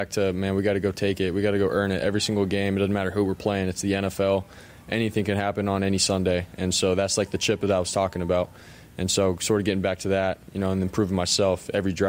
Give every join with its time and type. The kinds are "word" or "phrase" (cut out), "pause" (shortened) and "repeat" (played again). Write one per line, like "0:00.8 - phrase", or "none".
none